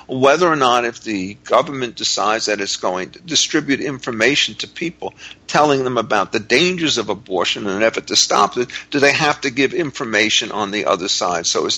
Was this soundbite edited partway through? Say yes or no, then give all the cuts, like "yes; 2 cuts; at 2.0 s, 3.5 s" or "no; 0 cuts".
no; 0 cuts